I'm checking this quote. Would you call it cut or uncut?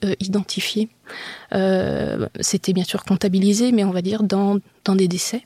uncut